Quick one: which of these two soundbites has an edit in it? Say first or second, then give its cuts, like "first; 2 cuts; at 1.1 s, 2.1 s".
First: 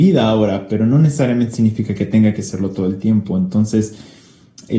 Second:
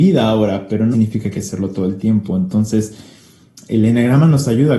second; 2 cuts; at 0.9 s, 1.3 s